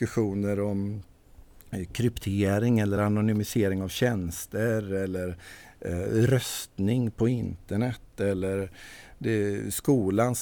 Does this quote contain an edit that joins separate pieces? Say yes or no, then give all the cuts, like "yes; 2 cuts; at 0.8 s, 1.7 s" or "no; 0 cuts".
no; 0 cuts